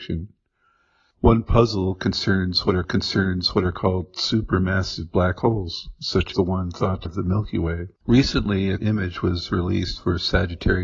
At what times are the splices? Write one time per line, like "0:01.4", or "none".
0:02.8
0:06.3
0:07.1
0:08.0
0:08.8